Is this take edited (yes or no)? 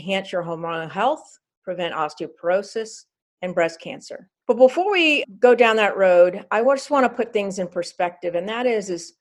no